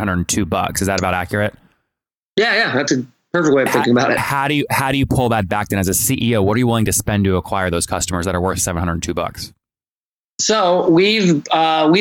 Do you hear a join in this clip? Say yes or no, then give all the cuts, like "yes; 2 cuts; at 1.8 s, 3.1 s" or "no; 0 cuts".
no; 0 cuts